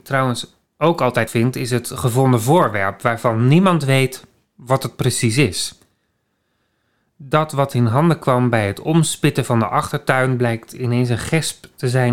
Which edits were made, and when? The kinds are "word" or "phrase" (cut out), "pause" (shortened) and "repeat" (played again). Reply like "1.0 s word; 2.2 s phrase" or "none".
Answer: 1.3 s word